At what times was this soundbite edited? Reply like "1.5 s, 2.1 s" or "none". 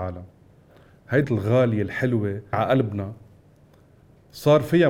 1.2 s, 2.5 s